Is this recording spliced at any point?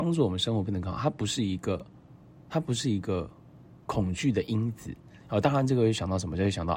no; 0 cuts

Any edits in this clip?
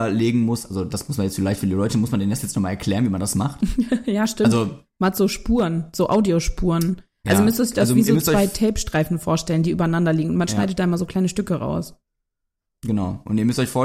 no; 0 cuts

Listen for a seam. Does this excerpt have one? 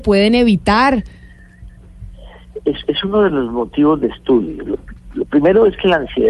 no; 0 cuts

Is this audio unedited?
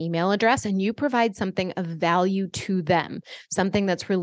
yes; 0 cuts

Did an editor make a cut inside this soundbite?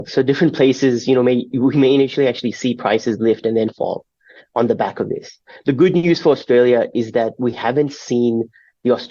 no; 0 cuts

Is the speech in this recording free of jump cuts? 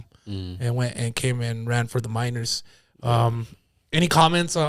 yes; 0 cuts

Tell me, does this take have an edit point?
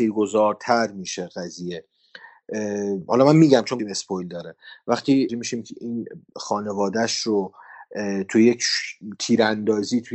yes; 2 cuts; at 3.8 s, 5.3 s

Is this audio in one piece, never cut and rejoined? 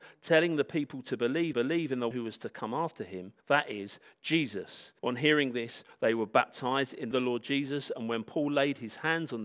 no; 5 cuts; at 1.5 s, 2.1 s, 3.4 s, 5.0 s, 7.1 s

